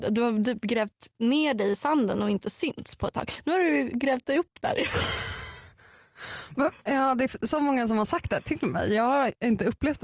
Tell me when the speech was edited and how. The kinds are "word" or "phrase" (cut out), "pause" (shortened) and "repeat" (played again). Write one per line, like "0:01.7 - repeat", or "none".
none